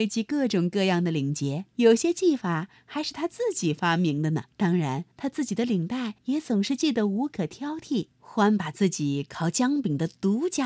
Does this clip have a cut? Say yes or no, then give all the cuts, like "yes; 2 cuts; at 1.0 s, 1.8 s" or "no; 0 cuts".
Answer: yes; 5 cuts; at 1.7 s, 4.5 s, 5.1 s, 6.2 s, 8.1 s